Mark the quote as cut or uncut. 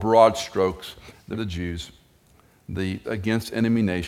cut